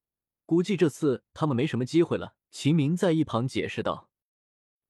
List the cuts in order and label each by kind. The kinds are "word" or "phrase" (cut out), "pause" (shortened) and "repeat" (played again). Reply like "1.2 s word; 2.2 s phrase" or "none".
2.4 s pause